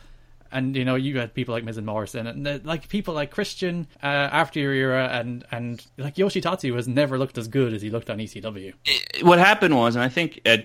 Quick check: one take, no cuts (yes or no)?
no